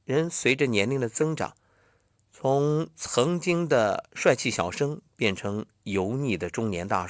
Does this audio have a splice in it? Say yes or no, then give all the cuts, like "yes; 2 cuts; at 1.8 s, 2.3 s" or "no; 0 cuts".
no; 0 cuts